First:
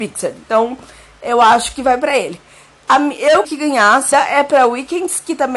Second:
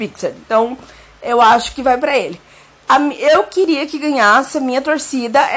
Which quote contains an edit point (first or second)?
first